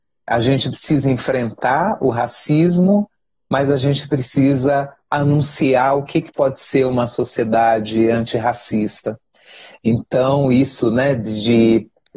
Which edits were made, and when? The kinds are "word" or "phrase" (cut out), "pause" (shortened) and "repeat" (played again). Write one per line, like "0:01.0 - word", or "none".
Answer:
none